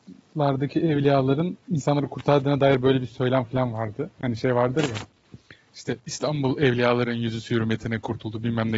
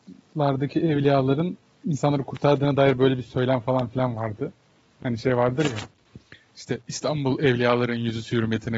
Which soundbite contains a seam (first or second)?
first